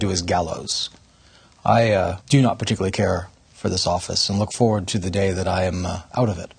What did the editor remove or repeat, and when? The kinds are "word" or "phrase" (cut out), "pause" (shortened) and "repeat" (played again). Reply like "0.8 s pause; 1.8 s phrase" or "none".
2.2 s pause